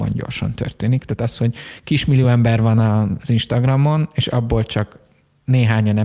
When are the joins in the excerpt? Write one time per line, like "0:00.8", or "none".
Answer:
none